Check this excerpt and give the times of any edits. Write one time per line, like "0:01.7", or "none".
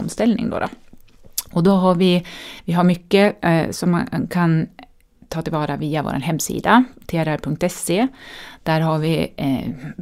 none